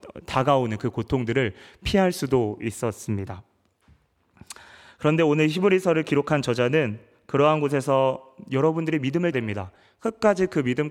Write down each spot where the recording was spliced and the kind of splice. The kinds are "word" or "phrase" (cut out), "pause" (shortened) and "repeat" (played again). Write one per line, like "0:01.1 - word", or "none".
0:09.3 - word